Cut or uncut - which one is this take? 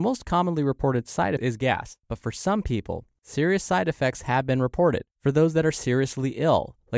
cut